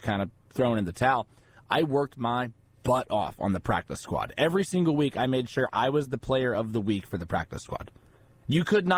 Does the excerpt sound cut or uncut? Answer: uncut